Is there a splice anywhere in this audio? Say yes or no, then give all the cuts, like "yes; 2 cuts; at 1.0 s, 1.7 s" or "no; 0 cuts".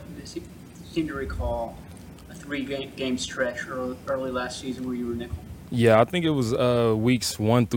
no; 0 cuts